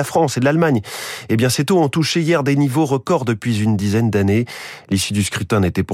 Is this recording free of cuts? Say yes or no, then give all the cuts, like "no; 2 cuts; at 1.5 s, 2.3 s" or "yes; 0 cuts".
yes; 0 cuts